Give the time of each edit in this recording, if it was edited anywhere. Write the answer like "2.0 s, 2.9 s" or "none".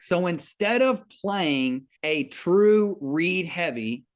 2.0 s